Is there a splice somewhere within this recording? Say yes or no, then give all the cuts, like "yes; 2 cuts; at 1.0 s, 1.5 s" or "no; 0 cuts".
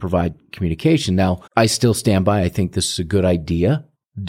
yes; 1 cut; at 1.5 s